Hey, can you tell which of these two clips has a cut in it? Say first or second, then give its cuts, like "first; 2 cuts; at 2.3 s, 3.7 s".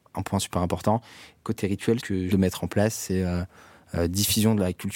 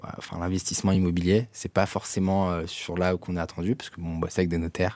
first; 2 cuts; at 2.0 s, 2.3 s